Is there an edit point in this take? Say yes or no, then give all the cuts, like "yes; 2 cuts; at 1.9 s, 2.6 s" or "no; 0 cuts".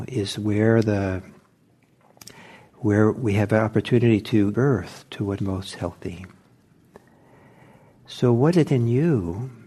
yes; 3 cuts; at 4.5 s, 5.4 s, 8.5 s